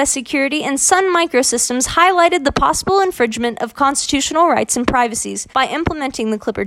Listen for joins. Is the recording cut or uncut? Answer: cut